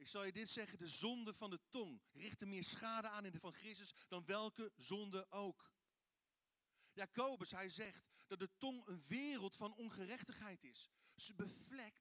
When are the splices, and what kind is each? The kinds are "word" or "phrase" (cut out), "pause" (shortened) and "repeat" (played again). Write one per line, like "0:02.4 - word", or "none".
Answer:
0:02.1 - pause
0:03.4 - word